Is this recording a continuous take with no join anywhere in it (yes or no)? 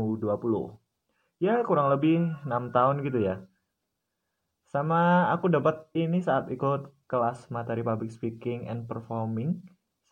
no